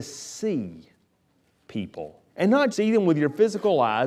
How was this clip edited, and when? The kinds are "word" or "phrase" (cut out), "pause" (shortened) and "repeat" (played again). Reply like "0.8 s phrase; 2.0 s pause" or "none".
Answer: 2.3 s pause; 2.7 s word